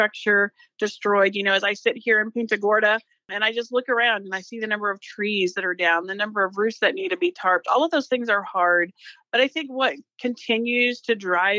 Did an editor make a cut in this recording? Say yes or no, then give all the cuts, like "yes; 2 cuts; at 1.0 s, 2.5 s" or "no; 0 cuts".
no; 0 cuts